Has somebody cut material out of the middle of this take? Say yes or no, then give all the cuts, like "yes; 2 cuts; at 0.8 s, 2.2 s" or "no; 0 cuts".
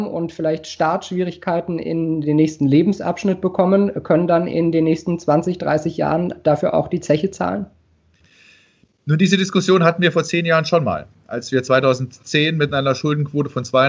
no; 0 cuts